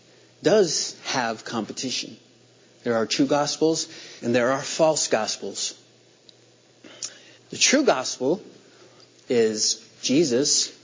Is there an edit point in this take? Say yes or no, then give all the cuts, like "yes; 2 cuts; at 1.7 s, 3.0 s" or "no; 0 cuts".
yes; 3 cuts; at 2.6 s, 4.2 s, 7.4 s